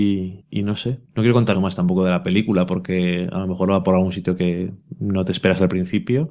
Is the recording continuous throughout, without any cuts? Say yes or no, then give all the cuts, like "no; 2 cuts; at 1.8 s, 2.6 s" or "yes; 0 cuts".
no; 2 cuts; at 1.1 s, 1.5 s